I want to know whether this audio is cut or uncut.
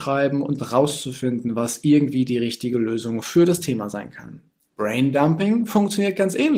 uncut